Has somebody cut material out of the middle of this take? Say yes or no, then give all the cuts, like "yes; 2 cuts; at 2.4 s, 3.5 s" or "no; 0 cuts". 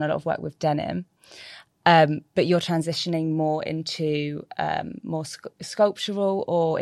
no; 0 cuts